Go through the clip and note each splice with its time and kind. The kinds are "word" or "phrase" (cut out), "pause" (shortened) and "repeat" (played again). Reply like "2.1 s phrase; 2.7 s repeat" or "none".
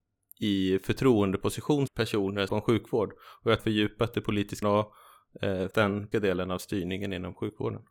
1.9 s word; 2.5 s phrase; 3.6 s phrase; 4.6 s word; 5.7 s word; 6.1 s word